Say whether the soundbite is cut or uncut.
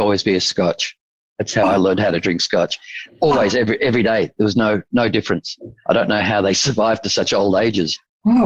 uncut